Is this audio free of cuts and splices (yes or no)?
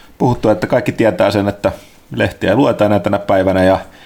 yes